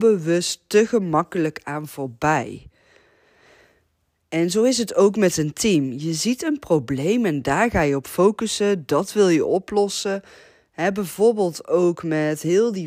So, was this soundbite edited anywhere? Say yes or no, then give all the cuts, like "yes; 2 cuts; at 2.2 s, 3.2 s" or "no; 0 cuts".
no; 0 cuts